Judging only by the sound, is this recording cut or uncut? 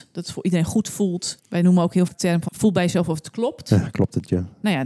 cut